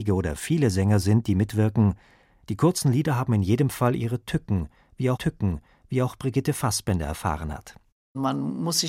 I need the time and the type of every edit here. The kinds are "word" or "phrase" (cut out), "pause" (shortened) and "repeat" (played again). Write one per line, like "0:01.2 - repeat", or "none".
0:05.1 - repeat